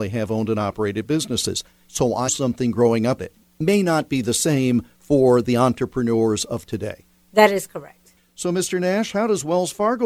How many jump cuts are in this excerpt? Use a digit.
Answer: 2